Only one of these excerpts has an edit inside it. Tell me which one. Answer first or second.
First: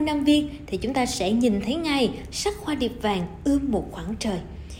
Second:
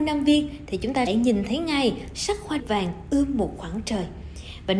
second